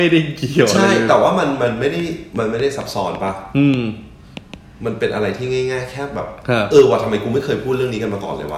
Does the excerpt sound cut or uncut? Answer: uncut